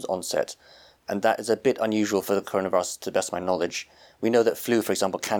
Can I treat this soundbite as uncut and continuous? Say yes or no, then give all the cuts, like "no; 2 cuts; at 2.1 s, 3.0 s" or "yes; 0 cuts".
yes; 0 cuts